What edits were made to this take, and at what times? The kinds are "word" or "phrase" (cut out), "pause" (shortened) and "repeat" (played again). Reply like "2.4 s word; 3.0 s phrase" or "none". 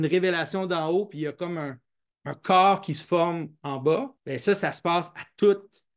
4.2 s pause